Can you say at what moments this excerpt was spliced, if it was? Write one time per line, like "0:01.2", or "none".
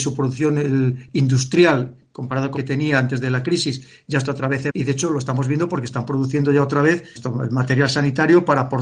0:02.6
0:04.7
0:07.2